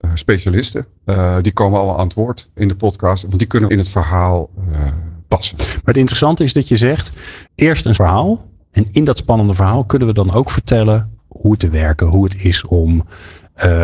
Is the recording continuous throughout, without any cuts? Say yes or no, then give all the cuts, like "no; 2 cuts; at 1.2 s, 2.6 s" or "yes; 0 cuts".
no; 7 cuts; at 0.9 s, 2.6 s, 3.7 s, 7.5 s, 8.0 s, 11.2 s, 11.6 s